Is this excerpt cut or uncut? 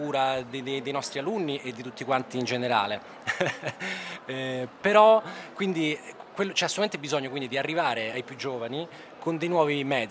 cut